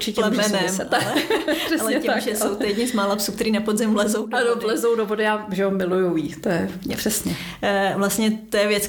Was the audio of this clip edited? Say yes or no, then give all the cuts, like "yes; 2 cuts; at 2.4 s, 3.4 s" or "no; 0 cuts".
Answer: no; 0 cuts